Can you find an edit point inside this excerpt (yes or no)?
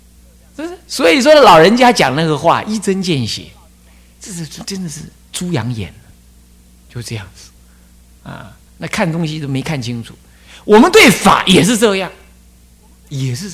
yes